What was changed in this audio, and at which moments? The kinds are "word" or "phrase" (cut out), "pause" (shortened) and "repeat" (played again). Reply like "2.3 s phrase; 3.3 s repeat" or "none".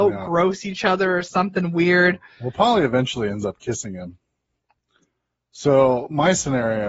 none